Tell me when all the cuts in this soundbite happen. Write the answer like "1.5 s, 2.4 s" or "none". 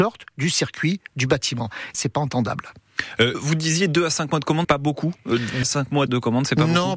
1.9 s, 3.3 s, 4.6 s, 5.6 s, 6.1 s